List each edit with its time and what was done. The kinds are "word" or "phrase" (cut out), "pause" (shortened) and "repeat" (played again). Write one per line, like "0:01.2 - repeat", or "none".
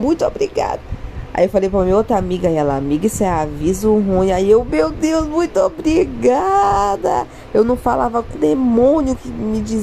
0:08.4 - word